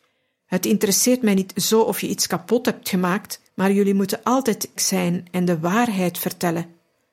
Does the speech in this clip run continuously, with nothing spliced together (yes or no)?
no